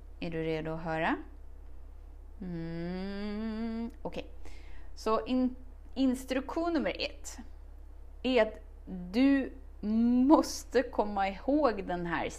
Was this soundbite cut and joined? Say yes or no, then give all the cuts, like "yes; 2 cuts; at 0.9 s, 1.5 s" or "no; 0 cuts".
no; 0 cuts